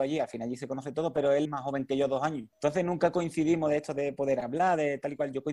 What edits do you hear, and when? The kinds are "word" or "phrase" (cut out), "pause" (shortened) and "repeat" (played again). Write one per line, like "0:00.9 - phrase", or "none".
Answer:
0:01.4 - word
0:02.5 - pause